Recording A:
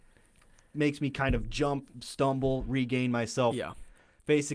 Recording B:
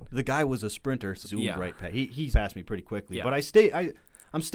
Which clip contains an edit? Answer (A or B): B